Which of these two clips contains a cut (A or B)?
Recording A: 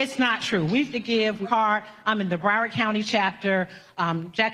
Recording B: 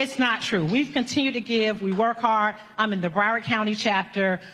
A